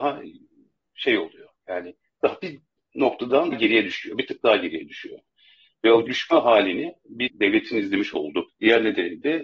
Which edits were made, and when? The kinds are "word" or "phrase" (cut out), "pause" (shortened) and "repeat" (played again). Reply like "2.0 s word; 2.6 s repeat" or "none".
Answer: 3.5 s word; 6.1 s word; 7.3 s word; 8.5 s word